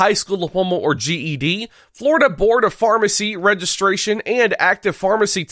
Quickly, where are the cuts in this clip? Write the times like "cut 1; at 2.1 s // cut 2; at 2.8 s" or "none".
none